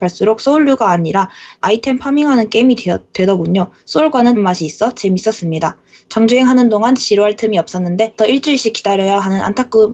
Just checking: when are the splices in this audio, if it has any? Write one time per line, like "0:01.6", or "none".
0:01.6
0:04.4
0:08.2